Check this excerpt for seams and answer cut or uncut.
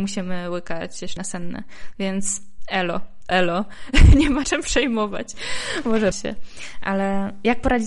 cut